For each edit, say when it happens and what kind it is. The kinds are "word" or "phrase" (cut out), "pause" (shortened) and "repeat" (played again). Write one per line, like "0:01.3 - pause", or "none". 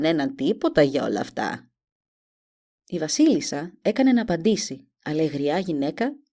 none